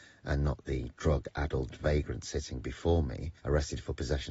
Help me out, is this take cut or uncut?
cut